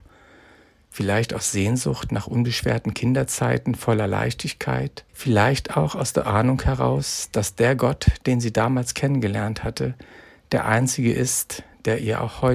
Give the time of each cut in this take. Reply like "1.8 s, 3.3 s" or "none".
5.1 s